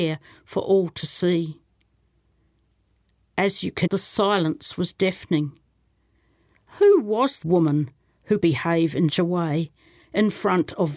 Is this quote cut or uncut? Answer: cut